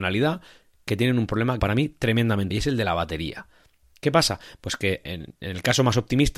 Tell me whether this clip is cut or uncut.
cut